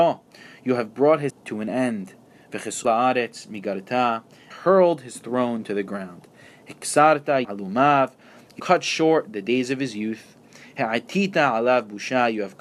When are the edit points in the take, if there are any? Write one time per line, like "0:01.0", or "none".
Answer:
0:01.3
0:02.8
0:04.5
0:07.4
0:08.6